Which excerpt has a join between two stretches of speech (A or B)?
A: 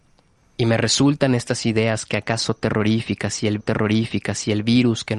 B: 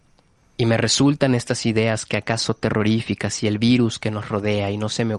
A